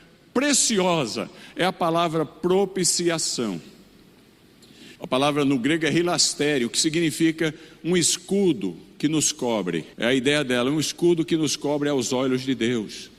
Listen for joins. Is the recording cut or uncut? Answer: cut